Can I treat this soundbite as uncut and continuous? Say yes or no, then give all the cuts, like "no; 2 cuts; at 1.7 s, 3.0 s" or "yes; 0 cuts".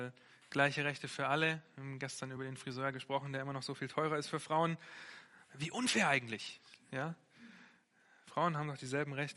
yes; 0 cuts